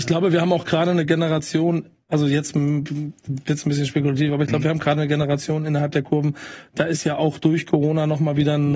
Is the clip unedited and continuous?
yes; 0 cuts

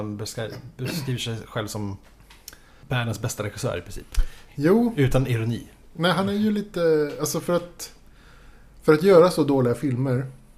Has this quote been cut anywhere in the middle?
no; 0 cuts

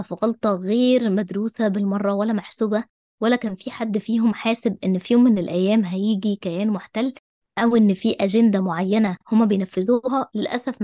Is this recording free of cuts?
no; 1 cut; at 9.2 s

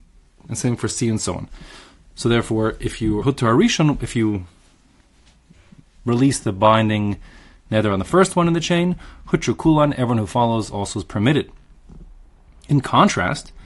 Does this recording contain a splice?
yes; 1 cut; at 3.2 s

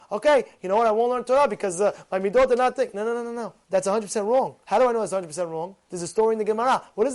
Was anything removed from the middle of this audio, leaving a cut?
yes; 3 cuts; at 3.6 s, 4.6 s, 5.8 s

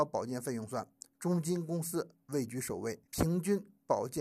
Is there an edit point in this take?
yes; 1 cut; at 3.1 s

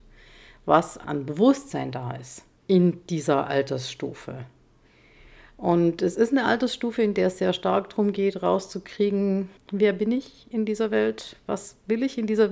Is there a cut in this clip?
yes; 1 cut; at 9.6 s

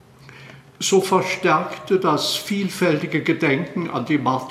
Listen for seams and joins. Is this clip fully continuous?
yes; 0 cuts

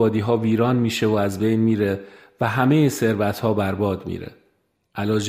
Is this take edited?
no; 0 cuts

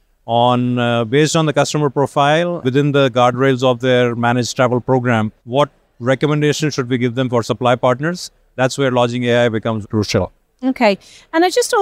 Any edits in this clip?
yes; 3 cuts; at 2.6 s, 5.4 s, 9.8 s

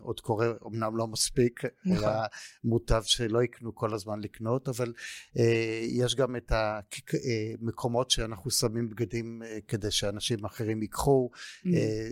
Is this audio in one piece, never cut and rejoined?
yes; 0 cuts

